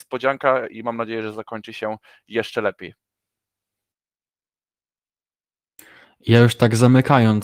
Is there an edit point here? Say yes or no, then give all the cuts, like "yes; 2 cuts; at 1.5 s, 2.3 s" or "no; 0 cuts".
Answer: no; 0 cuts